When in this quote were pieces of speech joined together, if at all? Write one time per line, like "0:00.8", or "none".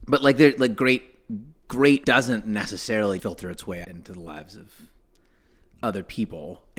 0:02.0
0:03.2
0:03.8